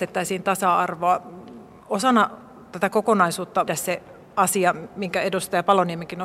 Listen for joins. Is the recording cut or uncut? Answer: cut